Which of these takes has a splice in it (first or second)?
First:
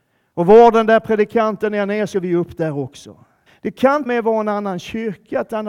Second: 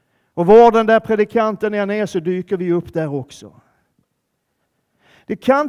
first